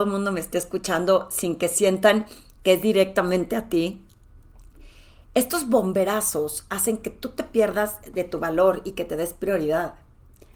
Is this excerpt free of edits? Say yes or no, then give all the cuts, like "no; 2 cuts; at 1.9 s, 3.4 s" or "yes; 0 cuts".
yes; 0 cuts